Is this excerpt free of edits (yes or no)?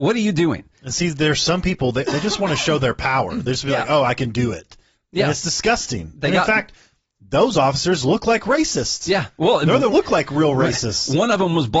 no